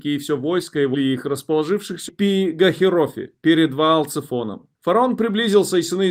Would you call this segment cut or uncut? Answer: cut